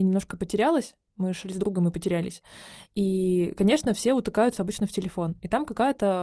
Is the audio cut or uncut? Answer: uncut